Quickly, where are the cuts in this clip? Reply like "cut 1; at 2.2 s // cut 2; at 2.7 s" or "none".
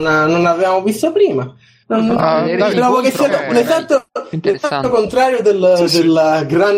cut 1; at 2.7 s // cut 2; at 3.3 s